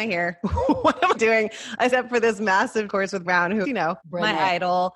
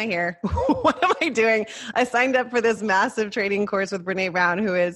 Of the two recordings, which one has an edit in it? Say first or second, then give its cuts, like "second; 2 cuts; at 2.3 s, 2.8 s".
first; 6 cuts; at 1.1 s, 1.9 s, 2.9 s, 3.2 s, 3.6 s, 4.0 s